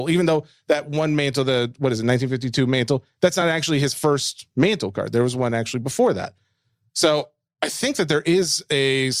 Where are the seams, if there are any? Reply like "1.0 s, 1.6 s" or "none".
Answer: none